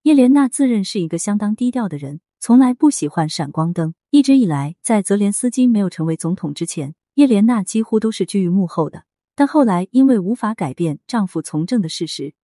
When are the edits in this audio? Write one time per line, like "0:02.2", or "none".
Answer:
0:04.0